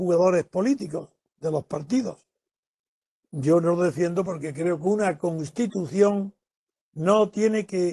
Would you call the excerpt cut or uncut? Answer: uncut